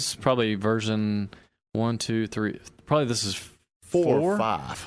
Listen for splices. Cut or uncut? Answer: uncut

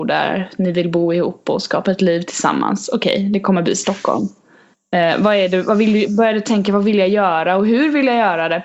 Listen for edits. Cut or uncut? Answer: uncut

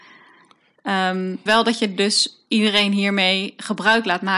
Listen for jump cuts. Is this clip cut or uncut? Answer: cut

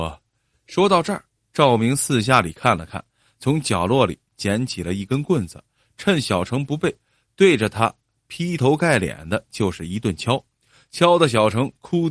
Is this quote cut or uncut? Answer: uncut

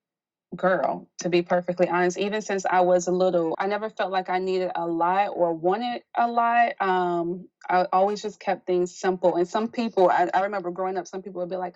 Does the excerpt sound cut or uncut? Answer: cut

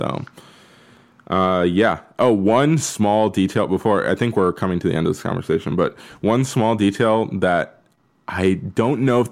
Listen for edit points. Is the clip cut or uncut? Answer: uncut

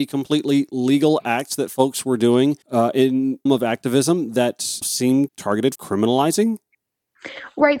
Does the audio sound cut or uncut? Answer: cut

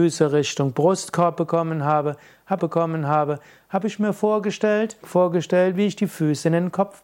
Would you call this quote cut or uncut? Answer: cut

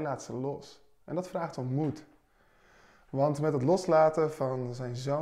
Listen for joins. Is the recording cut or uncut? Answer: uncut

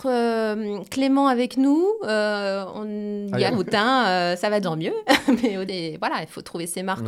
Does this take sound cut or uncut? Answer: cut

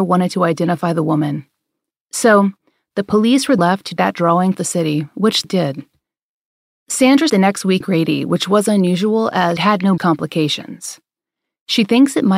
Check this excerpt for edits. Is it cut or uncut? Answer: cut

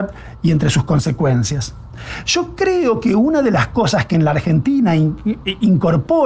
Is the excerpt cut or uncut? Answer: uncut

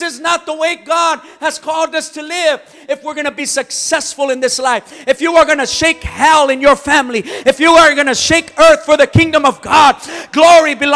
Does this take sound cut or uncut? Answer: uncut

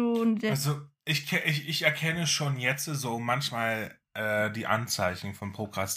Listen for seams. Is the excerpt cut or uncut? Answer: uncut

